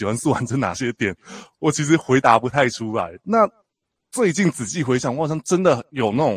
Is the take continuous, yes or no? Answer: yes